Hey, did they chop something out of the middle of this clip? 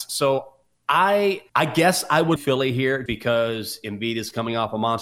yes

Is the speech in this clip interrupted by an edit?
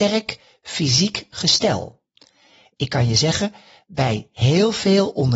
no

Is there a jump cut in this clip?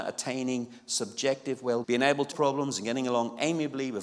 yes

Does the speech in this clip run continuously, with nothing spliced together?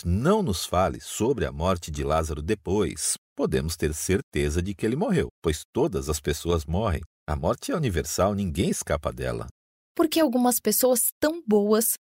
no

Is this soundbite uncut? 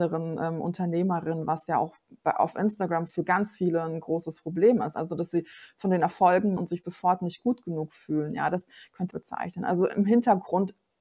no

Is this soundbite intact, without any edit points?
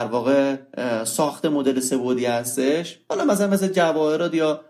yes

